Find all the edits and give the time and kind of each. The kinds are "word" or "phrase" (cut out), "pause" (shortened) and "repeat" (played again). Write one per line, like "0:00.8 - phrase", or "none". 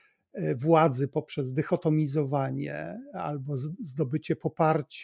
none